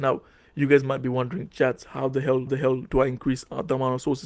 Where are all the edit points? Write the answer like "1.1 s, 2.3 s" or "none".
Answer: 2.5 s